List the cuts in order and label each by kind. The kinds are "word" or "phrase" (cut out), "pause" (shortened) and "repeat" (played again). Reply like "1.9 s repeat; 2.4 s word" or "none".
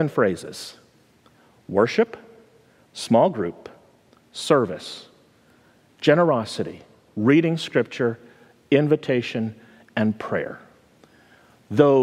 none